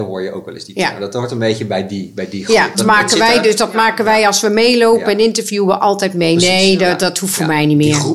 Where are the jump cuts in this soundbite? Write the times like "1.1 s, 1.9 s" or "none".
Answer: 2.7 s

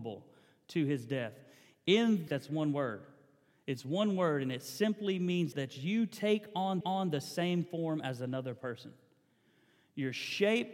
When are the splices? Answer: 2.3 s, 5.5 s, 6.8 s

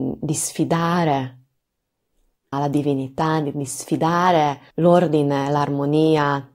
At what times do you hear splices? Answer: 2.5 s, 4.7 s

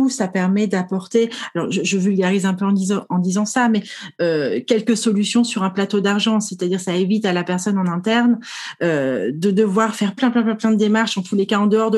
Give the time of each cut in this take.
10.2 s

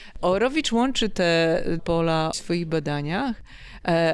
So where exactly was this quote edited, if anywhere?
1.8 s, 2.3 s

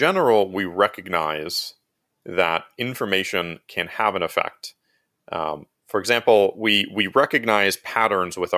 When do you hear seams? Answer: none

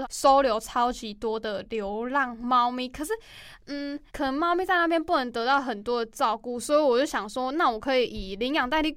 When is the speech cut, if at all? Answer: 4.1 s

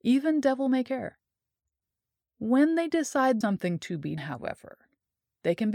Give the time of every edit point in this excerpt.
3.4 s, 4.2 s

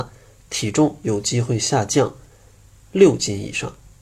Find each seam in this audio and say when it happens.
none

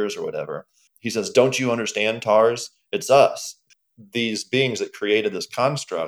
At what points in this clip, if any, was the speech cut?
none

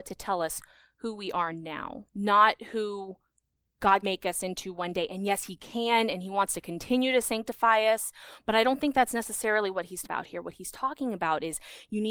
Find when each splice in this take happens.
2.1 s, 4.0 s, 10.0 s

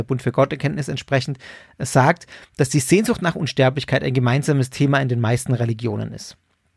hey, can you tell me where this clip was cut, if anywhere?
none

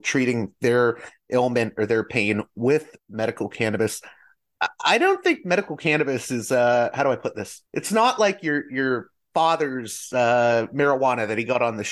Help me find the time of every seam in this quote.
7.7 s

